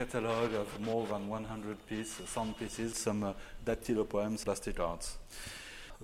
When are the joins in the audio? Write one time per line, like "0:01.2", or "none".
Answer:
0:02.9
0:04.4